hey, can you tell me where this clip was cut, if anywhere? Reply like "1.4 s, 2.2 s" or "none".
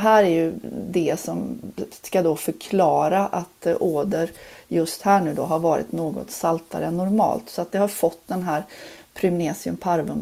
none